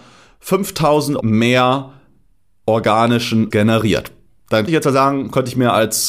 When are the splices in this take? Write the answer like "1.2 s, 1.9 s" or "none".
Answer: 1.2 s, 3.5 s, 4.7 s